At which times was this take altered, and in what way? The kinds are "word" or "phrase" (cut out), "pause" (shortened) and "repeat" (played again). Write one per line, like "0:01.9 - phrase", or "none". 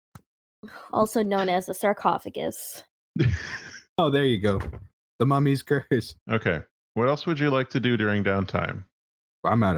none